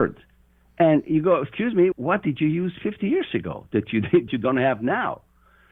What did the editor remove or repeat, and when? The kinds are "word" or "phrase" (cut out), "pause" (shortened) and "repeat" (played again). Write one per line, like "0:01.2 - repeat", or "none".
0:01.9 - word
0:04.3 - word